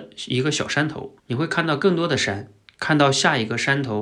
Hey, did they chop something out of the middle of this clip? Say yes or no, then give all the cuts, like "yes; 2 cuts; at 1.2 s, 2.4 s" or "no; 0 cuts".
yes; 1 cut; at 1.2 s